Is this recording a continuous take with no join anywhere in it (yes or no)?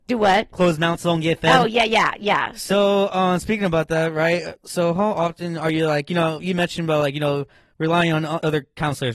yes